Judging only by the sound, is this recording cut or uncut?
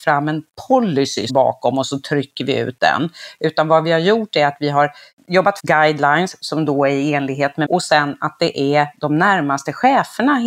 cut